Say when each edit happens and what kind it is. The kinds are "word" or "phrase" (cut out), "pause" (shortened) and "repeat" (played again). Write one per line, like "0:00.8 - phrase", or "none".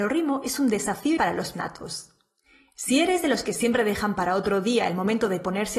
0:01.2 - word
0:01.5 - word